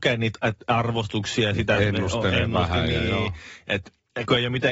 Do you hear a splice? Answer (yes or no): no